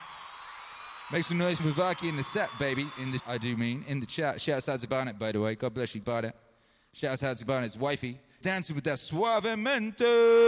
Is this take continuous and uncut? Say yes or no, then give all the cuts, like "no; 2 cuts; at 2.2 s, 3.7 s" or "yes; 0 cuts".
no; 6 cuts; at 1.6 s, 3.2 s, 4.9 s, 6.0 s, 7.5 s, 8.4 s